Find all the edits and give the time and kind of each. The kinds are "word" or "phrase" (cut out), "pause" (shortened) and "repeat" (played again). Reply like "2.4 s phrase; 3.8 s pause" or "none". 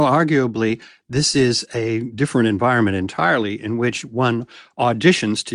none